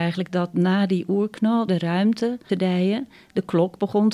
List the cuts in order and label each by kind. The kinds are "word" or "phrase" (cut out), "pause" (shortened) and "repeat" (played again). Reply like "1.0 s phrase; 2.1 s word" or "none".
1.7 s phrase; 2.5 s phrase